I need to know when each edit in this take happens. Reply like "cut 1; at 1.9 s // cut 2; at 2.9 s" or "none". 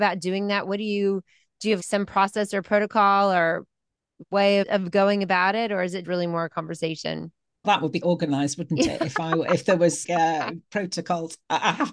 cut 1; at 1.8 s // cut 2; at 4.6 s // cut 3; at 6.0 s // cut 4; at 7.6 s // cut 5; at 8.0 s // cut 6; at 10.0 s